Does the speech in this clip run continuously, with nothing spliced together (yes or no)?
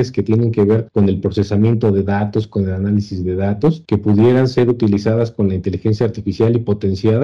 yes